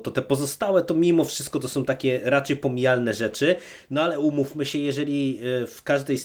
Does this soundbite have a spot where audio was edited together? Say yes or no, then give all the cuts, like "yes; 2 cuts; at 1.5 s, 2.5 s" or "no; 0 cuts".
no; 0 cuts